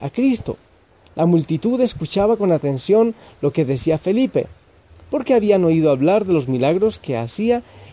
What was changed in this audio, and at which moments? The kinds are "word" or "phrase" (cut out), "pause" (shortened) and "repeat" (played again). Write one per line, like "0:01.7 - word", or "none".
none